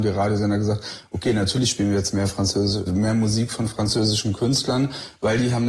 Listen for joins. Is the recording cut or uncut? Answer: cut